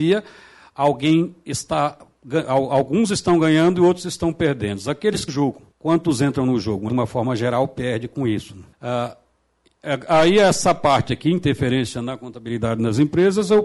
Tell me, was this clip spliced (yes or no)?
yes